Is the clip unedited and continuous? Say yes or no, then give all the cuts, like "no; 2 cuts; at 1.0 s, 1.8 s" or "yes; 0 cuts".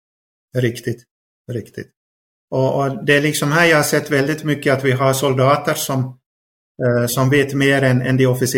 yes; 0 cuts